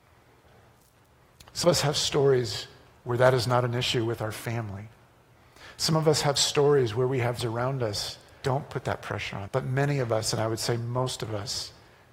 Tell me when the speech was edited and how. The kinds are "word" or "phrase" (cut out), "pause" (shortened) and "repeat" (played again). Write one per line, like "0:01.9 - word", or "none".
0:01.6 - word
0:07.4 - word
0:08.4 - word
0:09.5 - word